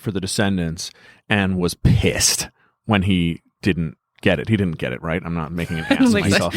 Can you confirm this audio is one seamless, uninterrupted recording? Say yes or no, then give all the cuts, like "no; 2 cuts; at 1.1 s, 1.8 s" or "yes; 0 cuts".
yes; 0 cuts